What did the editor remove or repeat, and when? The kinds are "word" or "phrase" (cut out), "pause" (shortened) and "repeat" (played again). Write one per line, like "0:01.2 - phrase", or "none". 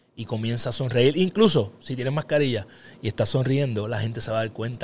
none

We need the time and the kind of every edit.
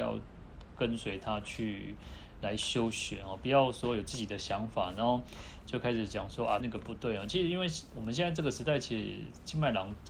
0:06.6 - phrase

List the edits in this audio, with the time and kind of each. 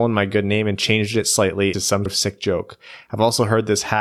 0:01.7 - word
0:02.1 - word

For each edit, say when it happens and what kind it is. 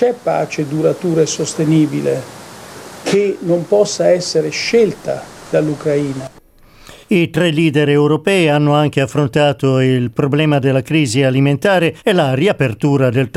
0:07.0 - pause
0:12.0 - pause

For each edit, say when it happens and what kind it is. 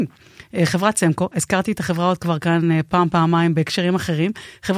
none

